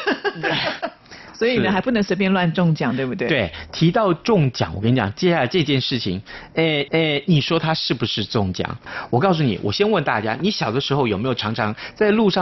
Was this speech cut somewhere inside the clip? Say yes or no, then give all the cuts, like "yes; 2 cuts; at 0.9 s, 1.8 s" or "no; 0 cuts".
yes; 1 cut; at 6.9 s